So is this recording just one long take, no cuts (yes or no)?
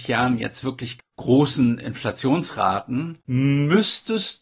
no